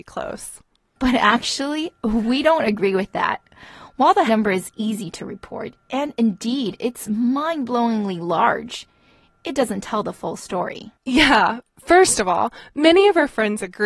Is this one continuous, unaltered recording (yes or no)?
no